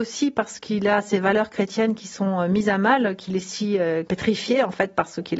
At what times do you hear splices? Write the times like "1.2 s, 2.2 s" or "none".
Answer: none